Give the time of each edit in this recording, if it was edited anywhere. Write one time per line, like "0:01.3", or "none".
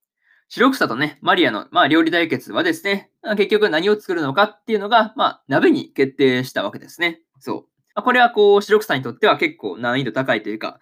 0:07.9